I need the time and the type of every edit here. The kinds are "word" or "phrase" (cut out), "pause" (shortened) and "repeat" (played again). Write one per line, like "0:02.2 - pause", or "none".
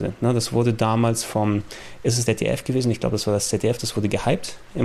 0:02.3 - word

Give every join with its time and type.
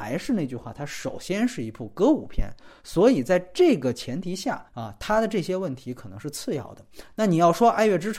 0:04.7 - pause

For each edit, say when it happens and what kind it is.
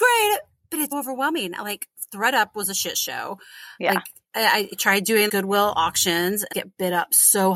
0:00.9 - word
0:05.3 - word
0:06.5 - phrase

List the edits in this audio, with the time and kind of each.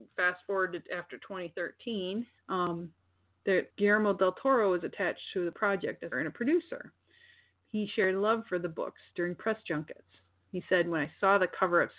0:02.4 - pause
0:03.7 - pause
0:06.1 - phrase

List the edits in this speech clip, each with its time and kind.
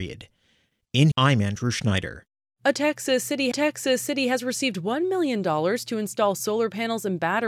0:01.1 - word
0:03.5 - repeat

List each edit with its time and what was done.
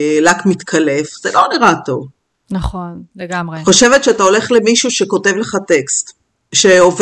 none

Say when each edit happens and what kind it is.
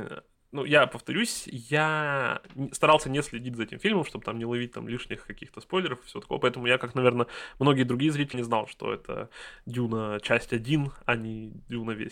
0:08.3 - word

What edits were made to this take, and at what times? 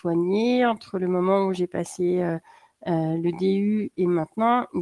none

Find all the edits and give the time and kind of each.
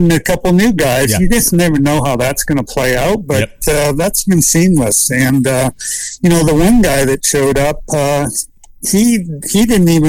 none

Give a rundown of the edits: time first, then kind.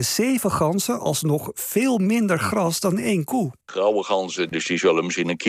0:03.6 - pause

